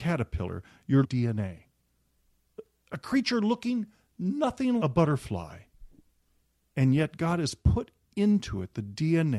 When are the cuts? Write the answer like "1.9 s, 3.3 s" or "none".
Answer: 1.0 s, 4.8 s

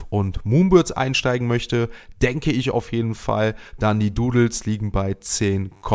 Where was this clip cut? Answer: none

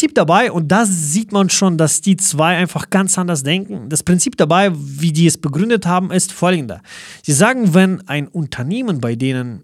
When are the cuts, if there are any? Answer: none

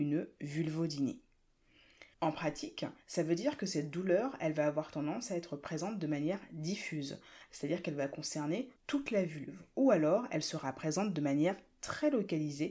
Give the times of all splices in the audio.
2.1 s, 3.0 s, 8.8 s

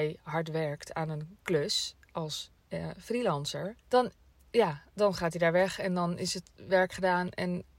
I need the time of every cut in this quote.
2.6 s, 3.8 s

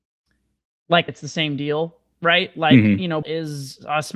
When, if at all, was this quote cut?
1.1 s, 3.2 s

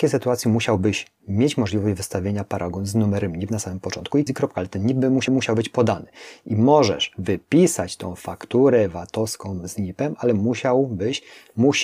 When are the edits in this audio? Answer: 4.3 s, 5.3 s

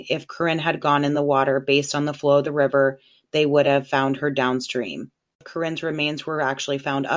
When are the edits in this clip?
none

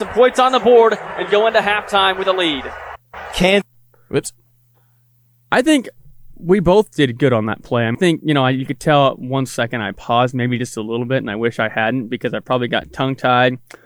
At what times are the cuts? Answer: 7.9 s

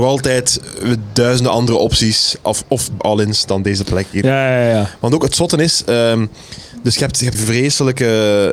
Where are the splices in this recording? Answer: 3.0 s, 7.3 s

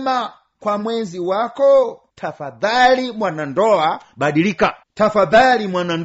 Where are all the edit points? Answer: 2.1 s, 4.8 s

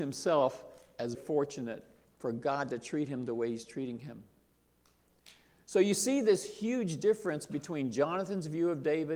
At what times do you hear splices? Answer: 1.1 s

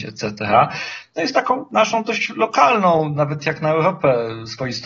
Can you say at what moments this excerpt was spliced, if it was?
none

